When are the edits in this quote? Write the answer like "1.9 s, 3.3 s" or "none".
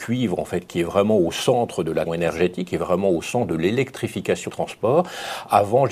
2.1 s, 4.5 s